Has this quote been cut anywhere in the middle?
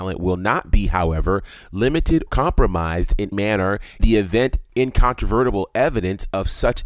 yes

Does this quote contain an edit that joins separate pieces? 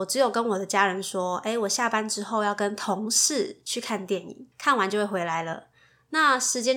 yes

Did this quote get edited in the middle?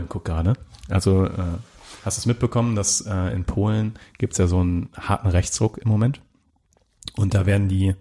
no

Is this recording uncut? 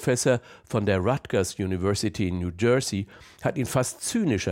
yes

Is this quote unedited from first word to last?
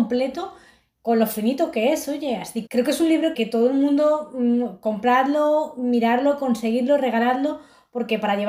no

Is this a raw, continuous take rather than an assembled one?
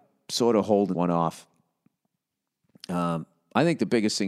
no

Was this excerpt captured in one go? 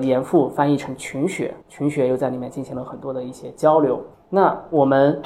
no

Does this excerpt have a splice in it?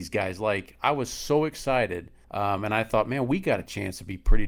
yes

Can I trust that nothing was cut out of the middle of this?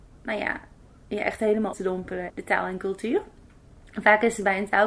no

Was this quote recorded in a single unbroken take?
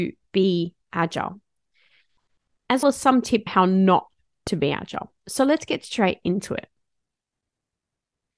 no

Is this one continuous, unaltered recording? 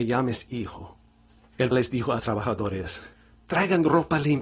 no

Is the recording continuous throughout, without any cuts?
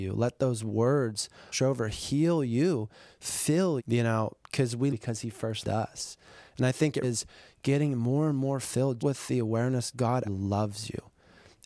no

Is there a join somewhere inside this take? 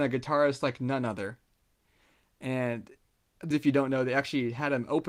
yes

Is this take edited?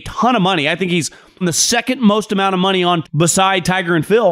yes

